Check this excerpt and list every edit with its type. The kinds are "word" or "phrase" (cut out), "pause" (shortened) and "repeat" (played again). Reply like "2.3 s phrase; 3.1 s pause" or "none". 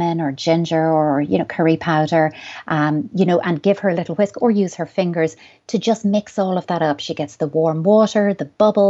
none